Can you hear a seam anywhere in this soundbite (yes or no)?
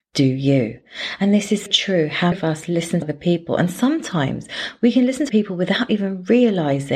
yes